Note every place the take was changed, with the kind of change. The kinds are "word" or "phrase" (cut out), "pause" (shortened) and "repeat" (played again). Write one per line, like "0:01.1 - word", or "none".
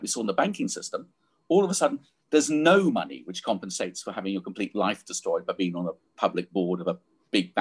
none